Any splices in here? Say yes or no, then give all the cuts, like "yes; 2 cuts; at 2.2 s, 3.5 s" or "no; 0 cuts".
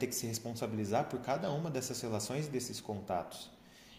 no; 0 cuts